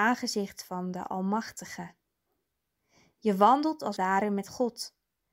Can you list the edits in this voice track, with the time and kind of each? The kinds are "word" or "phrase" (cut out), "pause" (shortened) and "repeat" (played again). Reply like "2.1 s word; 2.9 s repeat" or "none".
4.0 s word